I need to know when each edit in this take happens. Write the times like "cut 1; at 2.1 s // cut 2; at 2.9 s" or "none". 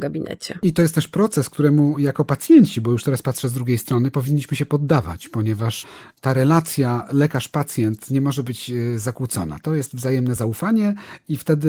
none